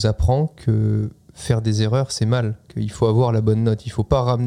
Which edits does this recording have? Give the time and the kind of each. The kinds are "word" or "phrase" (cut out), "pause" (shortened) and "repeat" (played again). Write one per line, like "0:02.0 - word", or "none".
none